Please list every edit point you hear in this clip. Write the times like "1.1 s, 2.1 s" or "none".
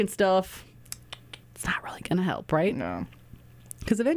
1.4 s

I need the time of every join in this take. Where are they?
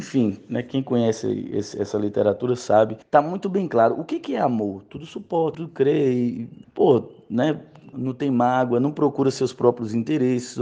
3.0 s, 5.5 s, 6.6 s, 7.9 s

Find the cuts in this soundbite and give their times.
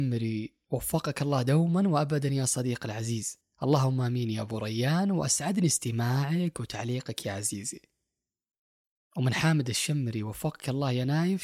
none

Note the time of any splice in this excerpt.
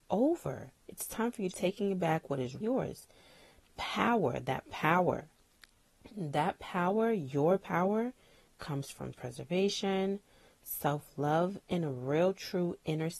1.5 s, 2.6 s, 9.1 s

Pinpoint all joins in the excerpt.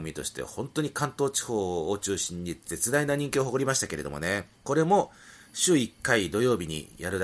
4.6 s

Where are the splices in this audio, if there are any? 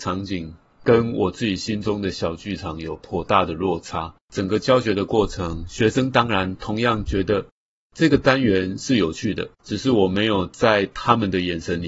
4.2 s, 9.5 s

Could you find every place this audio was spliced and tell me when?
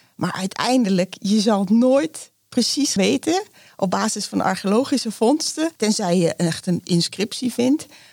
3.0 s, 5.8 s

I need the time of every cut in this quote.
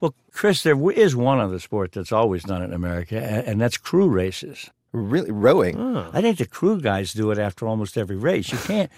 none

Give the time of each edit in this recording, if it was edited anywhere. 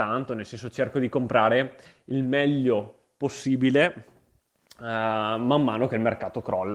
none

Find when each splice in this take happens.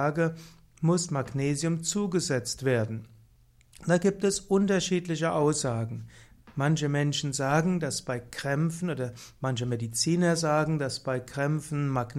none

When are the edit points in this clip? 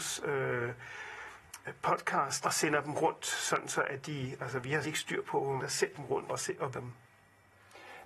2.4 s, 4.8 s, 5.6 s, 5.9 s, 6.3 s, 6.7 s

